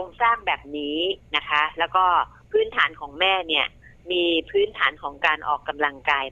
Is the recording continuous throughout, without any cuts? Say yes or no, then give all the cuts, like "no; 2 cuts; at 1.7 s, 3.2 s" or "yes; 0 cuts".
yes; 0 cuts